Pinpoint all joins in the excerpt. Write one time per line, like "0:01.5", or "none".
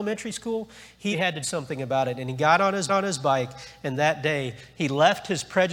0:01.1
0:01.4
0:02.9